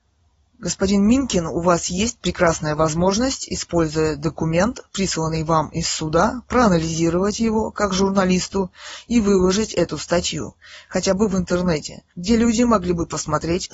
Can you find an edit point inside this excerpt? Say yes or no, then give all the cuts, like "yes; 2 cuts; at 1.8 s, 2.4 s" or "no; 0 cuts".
yes; 1 cut; at 12.1 s